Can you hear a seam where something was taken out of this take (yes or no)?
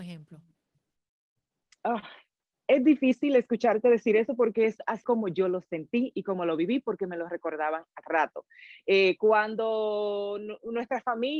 yes